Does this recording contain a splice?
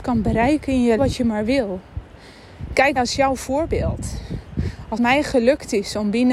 yes; 3 cuts; at 1.0 s, 3.0 s, 5.0 s

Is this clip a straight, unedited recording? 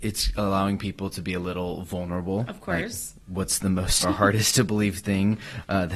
no; 1 cut; at 4.0 s

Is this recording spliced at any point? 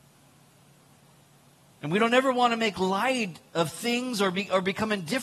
no; 0 cuts

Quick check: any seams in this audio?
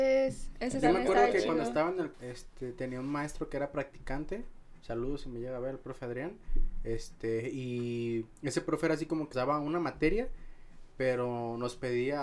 yes; 3 cuts; at 2.1 s, 8.4 s, 9.3 s

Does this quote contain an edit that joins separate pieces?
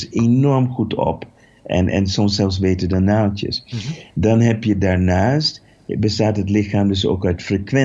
no; 0 cuts

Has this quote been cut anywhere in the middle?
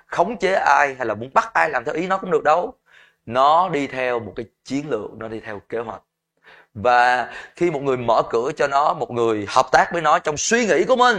no; 0 cuts

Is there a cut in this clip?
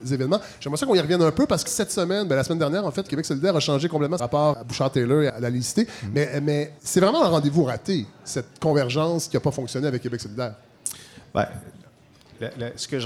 yes; 6 cuts; at 1.7 s, 3.1 s, 4.2 s, 4.5 s, 5.3 s, 6.8 s

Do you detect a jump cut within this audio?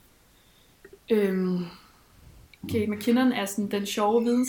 no; 0 cuts

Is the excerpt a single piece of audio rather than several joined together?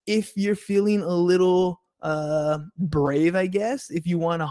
yes; 0 cuts

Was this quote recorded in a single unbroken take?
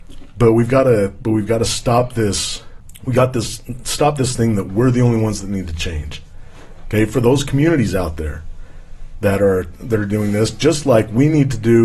yes; 0 cuts

